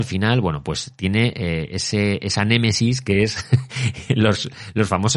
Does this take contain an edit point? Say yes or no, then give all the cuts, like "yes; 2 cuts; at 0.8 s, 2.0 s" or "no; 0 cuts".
no; 0 cuts